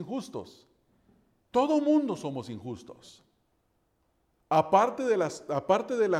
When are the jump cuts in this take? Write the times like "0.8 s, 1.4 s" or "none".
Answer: none

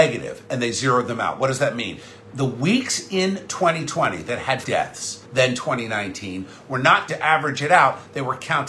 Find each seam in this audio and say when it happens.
4.6 s, 5.2 s, 7.1 s

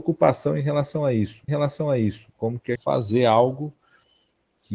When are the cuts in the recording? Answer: 1.5 s, 2.8 s

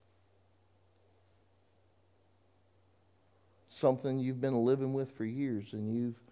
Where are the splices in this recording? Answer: none

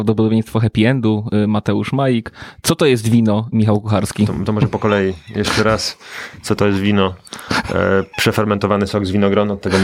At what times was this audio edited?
none

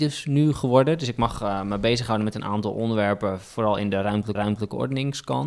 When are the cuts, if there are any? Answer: 4.4 s

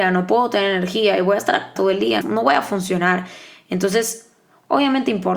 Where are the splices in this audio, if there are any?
1.8 s, 2.2 s

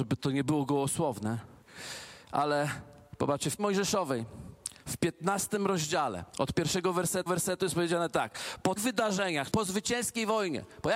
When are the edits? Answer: 3.6 s, 6.3 s, 7.3 s, 8.8 s, 9.5 s

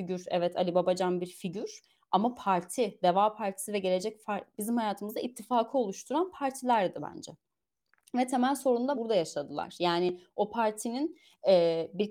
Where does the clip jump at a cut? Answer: 4.5 s, 8.9 s

